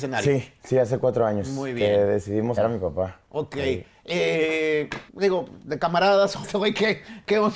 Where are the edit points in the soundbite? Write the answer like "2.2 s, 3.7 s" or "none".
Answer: 2.6 s, 5.1 s, 6.4 s